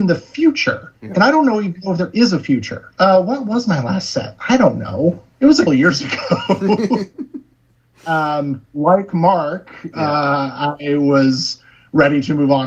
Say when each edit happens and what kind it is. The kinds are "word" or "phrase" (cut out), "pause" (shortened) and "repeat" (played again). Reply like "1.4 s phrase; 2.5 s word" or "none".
1.0 s pause; 5.3 s pause; 5.7 s word